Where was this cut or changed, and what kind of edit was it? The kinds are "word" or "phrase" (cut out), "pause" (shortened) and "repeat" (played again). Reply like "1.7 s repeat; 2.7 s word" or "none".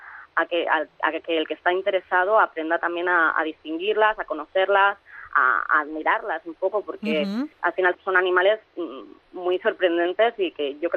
7.5 s pause; 7.9 s word